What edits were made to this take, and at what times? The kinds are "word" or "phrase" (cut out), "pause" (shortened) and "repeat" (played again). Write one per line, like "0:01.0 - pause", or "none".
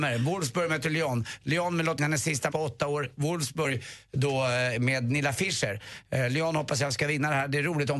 0:02.0 - word
0:02.5 - word